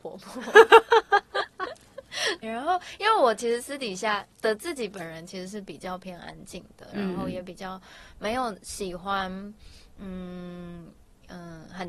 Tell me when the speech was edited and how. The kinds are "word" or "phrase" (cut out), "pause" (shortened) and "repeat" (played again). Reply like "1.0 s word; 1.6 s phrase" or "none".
2.4 s word; 4.3 s pause